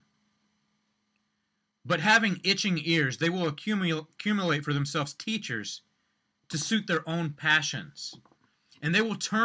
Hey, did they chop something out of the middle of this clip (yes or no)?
no